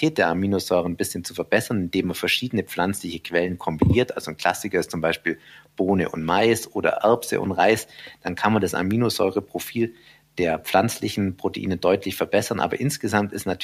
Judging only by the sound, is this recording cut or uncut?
uncut